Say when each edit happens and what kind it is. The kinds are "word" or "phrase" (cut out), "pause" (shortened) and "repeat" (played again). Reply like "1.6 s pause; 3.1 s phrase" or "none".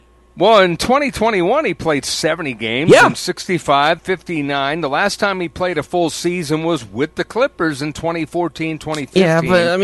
4.0 s word